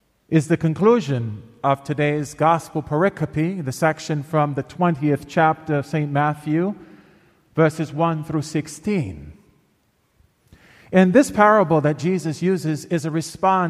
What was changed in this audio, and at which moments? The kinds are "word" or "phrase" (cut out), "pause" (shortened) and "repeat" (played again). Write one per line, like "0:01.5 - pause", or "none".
none

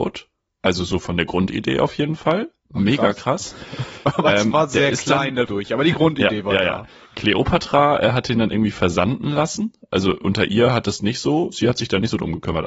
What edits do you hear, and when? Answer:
0:05.5 - phrase

